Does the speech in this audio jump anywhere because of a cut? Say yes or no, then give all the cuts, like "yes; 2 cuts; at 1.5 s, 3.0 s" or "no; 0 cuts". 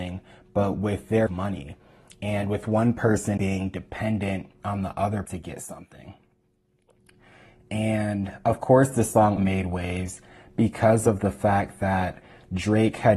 yes; 4 cuts; at 1.3 s, 3.4 s, 5.3 s, 9.4 s